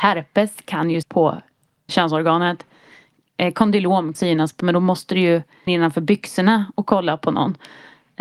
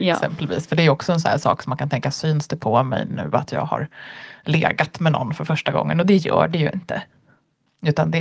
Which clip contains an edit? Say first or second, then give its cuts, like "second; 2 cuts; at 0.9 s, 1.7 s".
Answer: first; 5 cuts; at 1.0 s, 1.9 s, 4.1 s, 4.6 s, 5.7 s